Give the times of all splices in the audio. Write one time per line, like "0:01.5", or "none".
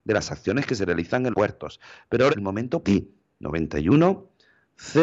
0:01.3
0:02.3
0:02.8

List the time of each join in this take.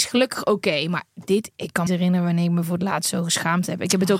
0:01.6
0:01.9

